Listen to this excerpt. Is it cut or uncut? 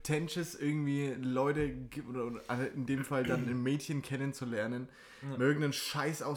uncut